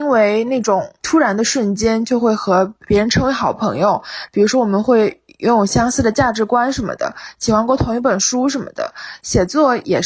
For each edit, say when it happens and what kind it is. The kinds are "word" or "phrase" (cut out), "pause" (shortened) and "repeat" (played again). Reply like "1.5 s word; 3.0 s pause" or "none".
1.0 s word; 2.8 s pause

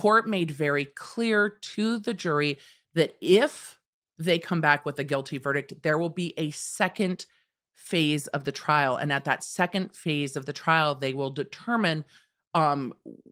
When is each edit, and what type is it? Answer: none

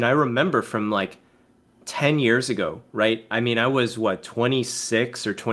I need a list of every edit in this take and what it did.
none

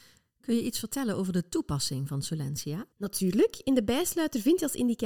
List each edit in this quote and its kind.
2.9 s pause

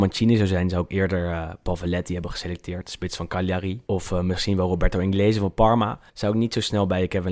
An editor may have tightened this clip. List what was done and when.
3.9 s pause; 6.1 s pause

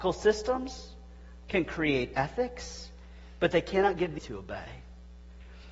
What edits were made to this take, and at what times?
4.2 s word

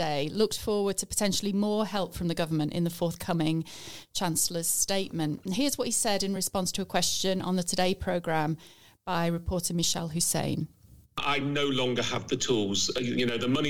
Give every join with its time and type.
none

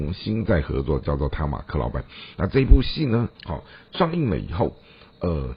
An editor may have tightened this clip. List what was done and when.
3.3 s pause

